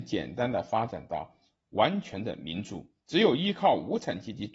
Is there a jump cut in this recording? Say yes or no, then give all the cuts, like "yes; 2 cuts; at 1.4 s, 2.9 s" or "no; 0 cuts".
no; 0 cuts